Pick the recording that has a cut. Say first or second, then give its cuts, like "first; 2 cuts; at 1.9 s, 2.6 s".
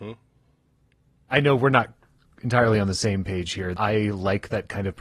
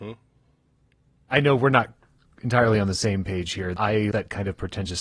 second; 1 cut; at 4.1 s